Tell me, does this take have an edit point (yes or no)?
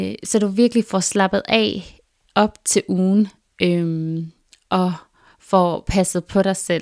no